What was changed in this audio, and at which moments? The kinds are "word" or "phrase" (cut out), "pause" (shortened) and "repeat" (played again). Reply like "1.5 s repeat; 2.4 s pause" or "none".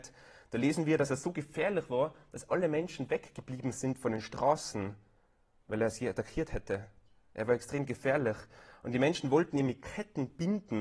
none